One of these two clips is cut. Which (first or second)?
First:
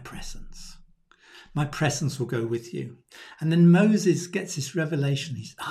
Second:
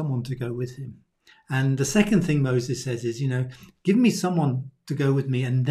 second